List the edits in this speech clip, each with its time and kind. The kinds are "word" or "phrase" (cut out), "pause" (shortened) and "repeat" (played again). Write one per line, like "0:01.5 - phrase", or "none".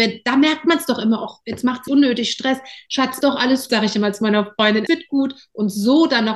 0:01.9 - word
0:03.2 - word
0:03.7 - word
0:04.9 - word